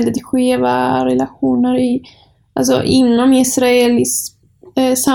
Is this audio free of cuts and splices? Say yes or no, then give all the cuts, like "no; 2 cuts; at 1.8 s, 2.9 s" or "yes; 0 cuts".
yes; 0 cuts